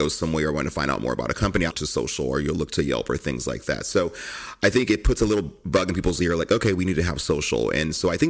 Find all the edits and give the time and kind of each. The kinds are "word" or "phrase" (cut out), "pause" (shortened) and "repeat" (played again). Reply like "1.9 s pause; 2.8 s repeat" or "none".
1.7 s word